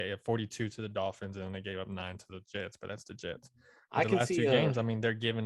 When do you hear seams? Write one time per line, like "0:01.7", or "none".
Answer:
none